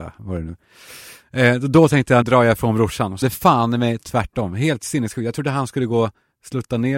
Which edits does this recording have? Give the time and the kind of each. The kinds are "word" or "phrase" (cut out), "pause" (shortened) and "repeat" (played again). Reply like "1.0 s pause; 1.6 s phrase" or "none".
2.2 s word; 3.2 s word